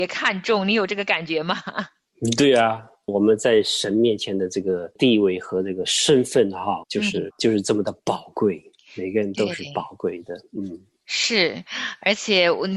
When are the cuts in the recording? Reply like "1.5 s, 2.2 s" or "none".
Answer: 6.8 s, 7.3 s